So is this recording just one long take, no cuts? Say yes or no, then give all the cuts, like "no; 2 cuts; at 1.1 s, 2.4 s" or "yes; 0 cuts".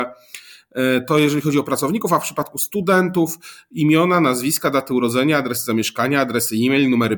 yes; 0 cuts